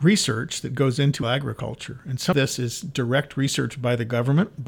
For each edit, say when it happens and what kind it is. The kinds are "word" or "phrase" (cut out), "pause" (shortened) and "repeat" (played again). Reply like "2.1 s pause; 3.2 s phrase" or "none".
1.2 s word; 2.3 s word